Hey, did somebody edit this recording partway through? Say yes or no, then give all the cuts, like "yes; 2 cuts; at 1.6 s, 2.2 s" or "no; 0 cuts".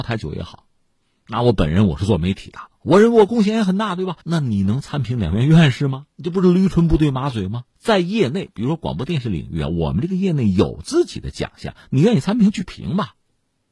yes; 3 cuts; at 4.2 s, 6.1 s, 7.7 s